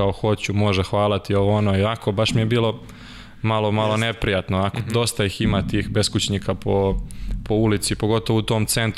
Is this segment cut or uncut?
uncut